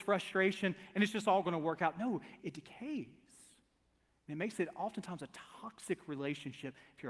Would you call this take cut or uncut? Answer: cut